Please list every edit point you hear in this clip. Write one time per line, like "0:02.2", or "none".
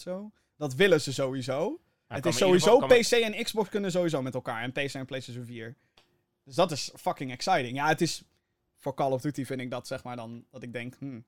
none

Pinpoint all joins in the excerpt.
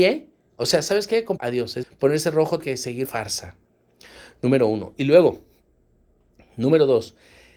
0:01.4
0:01.8
0:02.6
0:03.0

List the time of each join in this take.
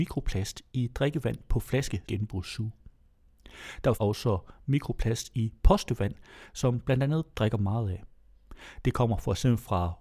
0:02.0
0:03.9
0:07.3

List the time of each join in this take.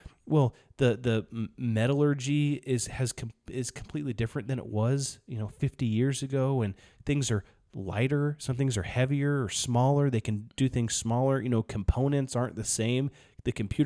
none

